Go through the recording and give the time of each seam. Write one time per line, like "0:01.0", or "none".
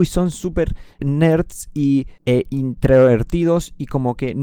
0:01.0
0:02.2